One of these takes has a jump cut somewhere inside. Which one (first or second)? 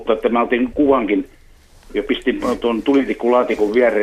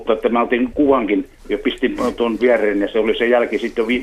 second